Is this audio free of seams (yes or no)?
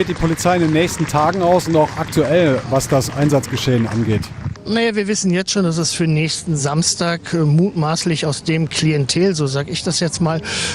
yes